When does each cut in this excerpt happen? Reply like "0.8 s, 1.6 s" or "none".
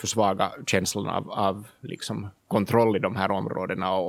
none